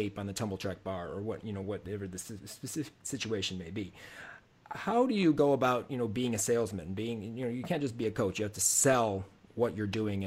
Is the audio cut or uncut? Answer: uncut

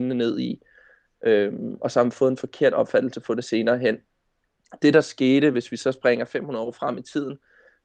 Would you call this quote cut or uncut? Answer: uncut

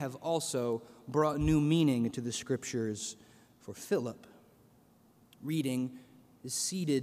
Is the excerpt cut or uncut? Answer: uncut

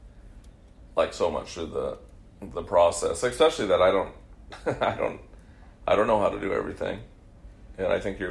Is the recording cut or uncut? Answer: uncut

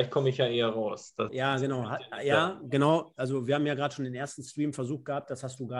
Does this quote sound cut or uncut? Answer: cut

